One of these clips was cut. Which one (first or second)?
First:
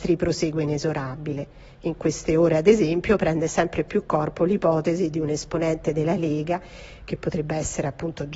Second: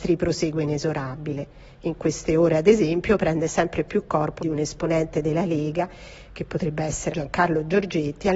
second